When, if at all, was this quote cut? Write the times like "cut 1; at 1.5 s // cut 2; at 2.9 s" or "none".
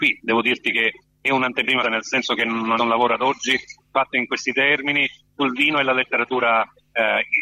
cut 1; at 1.8 s // cut 2; at 2.8 s